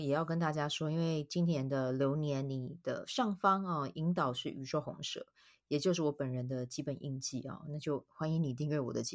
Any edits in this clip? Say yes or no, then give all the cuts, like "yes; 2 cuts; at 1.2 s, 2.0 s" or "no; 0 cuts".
no; 0 cuts